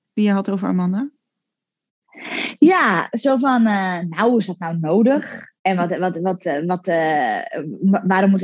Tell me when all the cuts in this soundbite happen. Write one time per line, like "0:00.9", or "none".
0:05.6